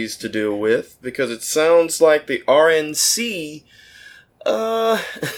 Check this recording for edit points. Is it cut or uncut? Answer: uncut